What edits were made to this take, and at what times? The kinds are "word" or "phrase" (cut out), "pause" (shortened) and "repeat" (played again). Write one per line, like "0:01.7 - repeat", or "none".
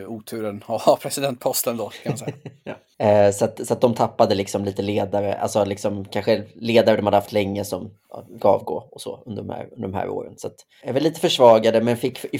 0:08.4 - word
0:10.8 - word